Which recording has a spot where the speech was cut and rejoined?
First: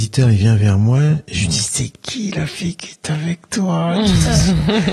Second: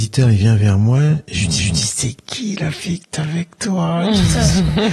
second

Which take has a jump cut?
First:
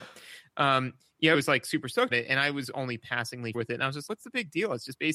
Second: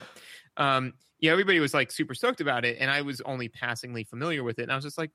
first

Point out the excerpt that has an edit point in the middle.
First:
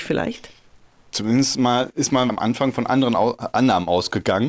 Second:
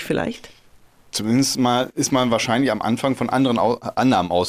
first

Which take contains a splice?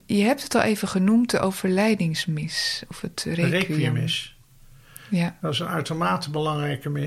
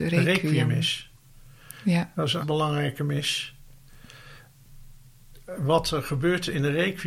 second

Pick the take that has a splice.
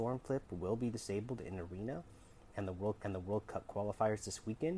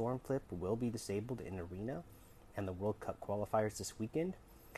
first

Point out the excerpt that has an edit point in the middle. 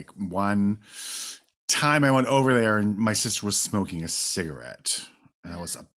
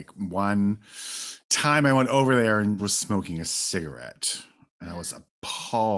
second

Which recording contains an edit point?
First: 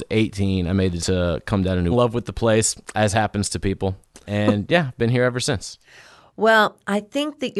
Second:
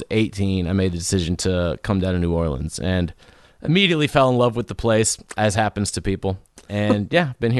first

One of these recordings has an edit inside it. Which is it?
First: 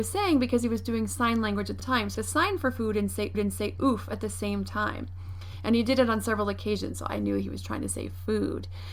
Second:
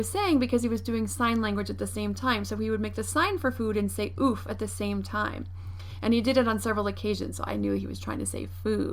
first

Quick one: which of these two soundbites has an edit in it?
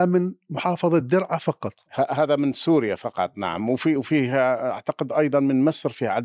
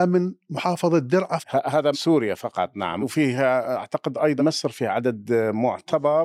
second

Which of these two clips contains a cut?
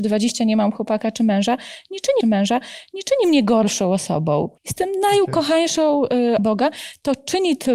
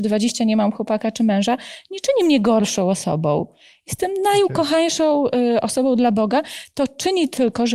first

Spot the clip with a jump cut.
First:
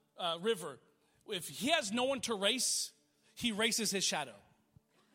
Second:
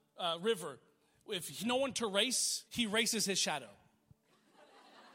second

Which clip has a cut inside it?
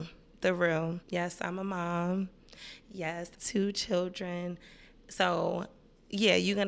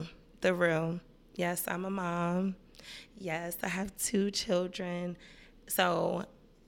first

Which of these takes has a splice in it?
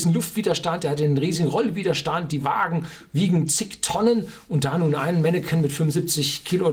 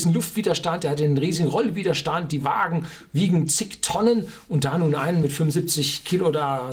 second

